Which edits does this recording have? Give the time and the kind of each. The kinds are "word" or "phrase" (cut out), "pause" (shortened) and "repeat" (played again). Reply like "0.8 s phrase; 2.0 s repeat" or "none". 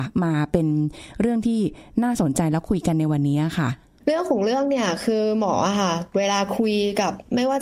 none